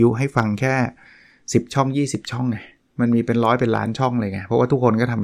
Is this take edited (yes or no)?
no